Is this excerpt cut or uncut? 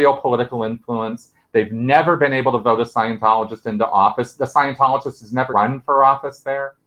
cut